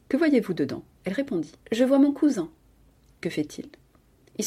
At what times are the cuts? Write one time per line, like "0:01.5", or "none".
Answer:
0:01.6

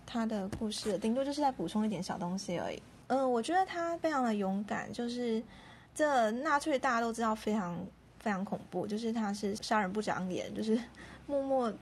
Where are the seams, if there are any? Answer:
0:05.9

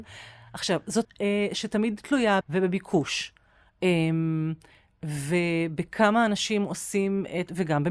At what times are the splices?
0:01.0
0:02.4

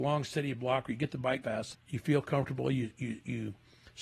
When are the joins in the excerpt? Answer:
0:01.4
0:01.7

